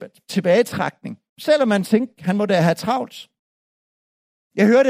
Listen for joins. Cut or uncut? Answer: uncut